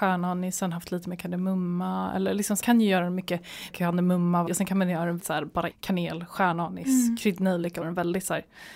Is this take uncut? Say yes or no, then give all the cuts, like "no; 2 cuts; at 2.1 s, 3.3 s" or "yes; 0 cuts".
no; 6 cuts; at 2.6 s, 3.7 s, 4.5 s, 5.2 s, 5.7 s, 7.8 s